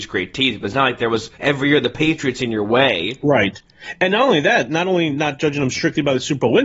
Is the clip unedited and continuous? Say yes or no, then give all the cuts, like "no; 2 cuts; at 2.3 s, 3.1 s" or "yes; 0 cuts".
no; 1 cut; at 1.3 s